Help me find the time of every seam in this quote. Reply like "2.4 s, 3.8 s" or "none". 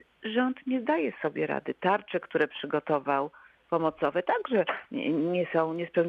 3.6 s